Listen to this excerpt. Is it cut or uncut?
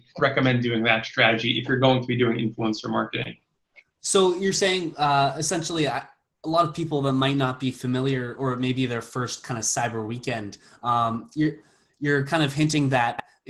uncut